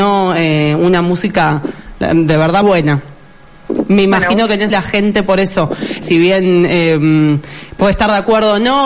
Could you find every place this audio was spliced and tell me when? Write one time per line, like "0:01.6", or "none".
0:02.6
0:04.7
0:06.0